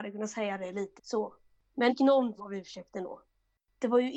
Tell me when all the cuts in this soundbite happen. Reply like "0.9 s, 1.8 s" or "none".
1.0 s, 1.9 s, 2.4 s